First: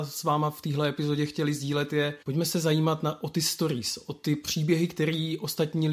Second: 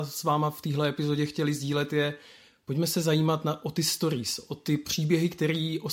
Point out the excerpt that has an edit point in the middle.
first; 1 cut; at 2.2 s

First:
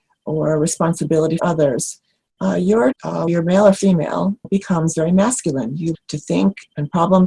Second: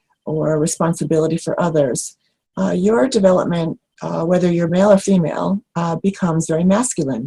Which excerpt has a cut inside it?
first; 5 cuts; at 1.4 s, 2.9 s, 3.3 s, 4.4 s, 5.9 s

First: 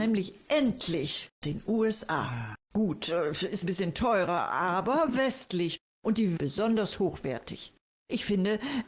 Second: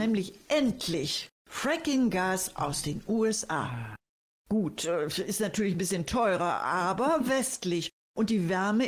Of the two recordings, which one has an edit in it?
first; 4 cuts; at 1.4 s, 2.6 s, 3.6 s, 6.4 s

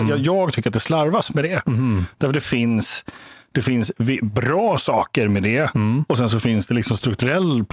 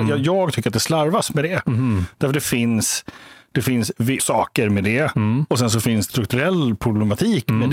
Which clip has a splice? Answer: second; 2 cuts; at 4.2 s, 6.1 s

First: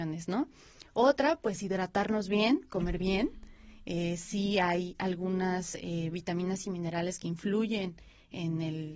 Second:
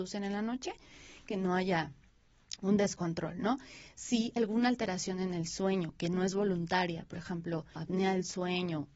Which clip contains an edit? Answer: second; 3 cuts; at 1.2 s, 4.4 s, 7.8 s

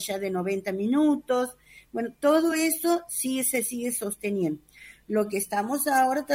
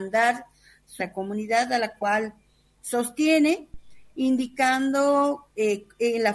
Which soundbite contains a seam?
second; 1 cut; at 1.0 s

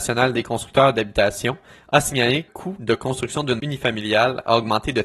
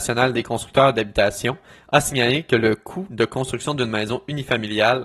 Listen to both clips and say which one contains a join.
first; 2 cuts; at 2.5 s, 3.6 s

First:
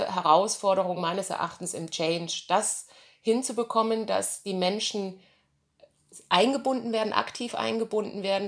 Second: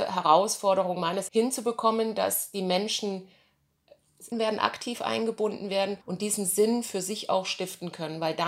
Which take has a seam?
second; 3 cuts; at 1.3 s, 4.3 s, 6.0 s

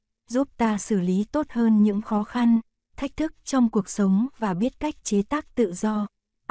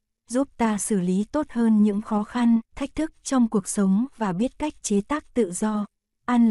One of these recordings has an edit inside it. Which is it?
second; 1 cut; at 2.6 s

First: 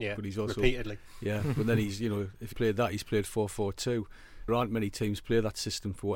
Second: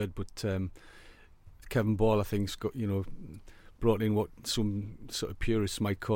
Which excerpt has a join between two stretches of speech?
first; 2 cuts; at 2.5 s, 4.5 s

